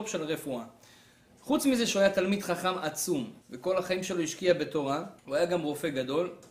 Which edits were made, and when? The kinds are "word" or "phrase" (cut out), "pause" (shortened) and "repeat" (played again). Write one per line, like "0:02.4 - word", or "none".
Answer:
0:03.4 - pause
0:05.2 - pause